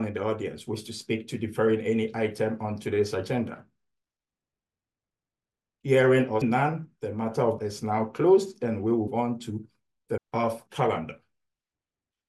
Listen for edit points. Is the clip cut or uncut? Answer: cut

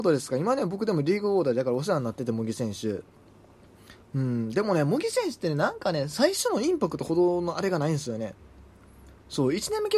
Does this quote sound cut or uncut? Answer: cut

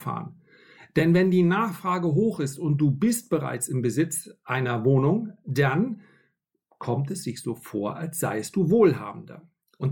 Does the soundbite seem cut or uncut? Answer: uncut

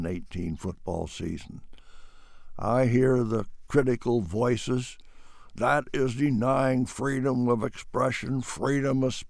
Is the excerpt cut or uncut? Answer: uncut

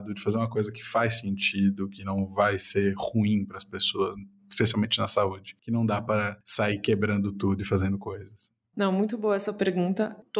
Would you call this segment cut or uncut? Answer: uncut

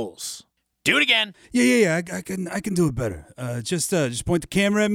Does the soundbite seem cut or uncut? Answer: cut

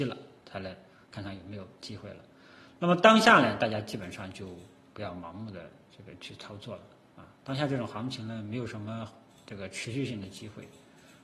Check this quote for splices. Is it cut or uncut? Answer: cut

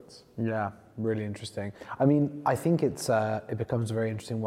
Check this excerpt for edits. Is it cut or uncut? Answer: uncut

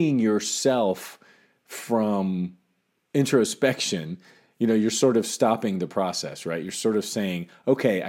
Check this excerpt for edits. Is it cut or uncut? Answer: uncut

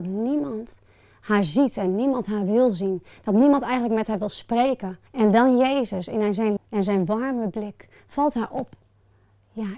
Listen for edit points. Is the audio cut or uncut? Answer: cut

